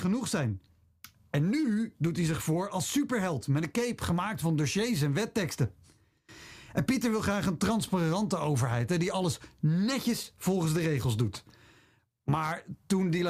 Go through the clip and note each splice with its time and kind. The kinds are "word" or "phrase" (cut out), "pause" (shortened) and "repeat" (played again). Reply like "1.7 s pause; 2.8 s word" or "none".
none